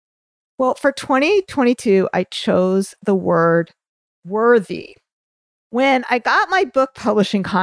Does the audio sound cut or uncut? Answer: uncut